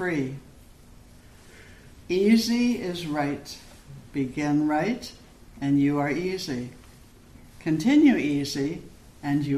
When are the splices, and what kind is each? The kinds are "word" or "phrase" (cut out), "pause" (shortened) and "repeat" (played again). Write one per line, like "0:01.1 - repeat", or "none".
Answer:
none